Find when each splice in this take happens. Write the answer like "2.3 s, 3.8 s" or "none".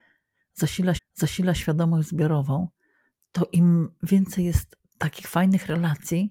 1.0 s